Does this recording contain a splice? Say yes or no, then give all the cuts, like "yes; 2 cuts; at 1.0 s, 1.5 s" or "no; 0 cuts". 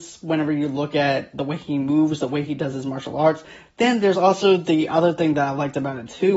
no; 0 cuts